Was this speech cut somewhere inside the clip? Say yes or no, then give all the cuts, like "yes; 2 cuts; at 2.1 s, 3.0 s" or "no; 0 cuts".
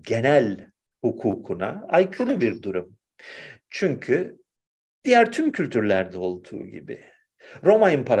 no; 0 cuts